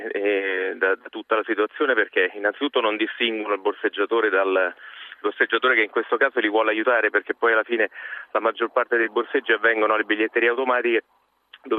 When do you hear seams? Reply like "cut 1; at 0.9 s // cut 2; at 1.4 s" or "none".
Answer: none